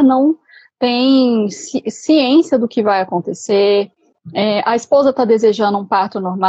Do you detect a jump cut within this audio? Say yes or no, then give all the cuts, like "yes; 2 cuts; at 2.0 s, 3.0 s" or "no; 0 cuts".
no; 0 cuts